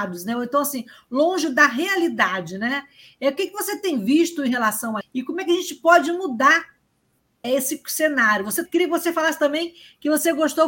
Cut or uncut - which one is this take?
cut